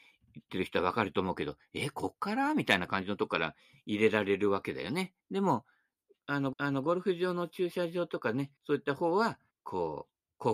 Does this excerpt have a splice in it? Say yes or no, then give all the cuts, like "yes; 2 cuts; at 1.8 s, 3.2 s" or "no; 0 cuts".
yes; 4 cuts; at 5.2 s, 6.5 s, 8.6 s, 9.5 s